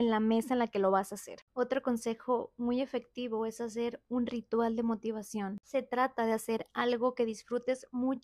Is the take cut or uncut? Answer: uncut